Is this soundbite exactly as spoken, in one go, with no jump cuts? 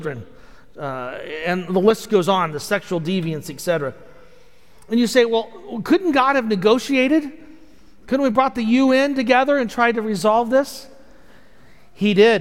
yes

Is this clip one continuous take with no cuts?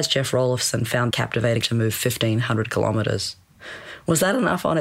no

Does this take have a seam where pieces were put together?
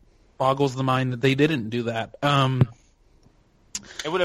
no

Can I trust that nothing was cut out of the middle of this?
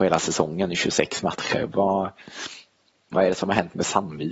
yes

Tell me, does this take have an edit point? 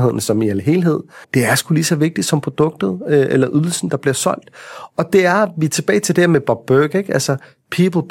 yes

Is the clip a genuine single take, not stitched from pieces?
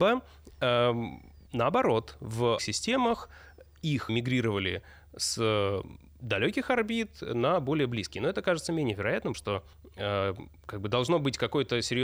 no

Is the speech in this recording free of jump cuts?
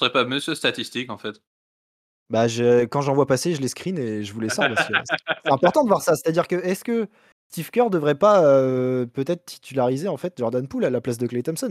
yes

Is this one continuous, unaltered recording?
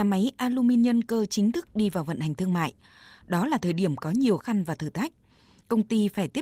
no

